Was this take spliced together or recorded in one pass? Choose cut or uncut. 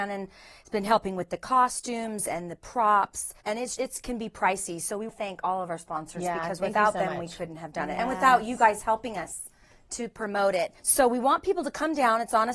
cut